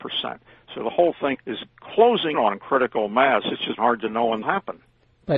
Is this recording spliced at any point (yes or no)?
yes